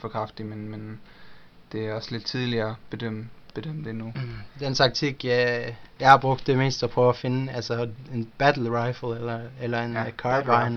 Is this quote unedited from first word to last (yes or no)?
yes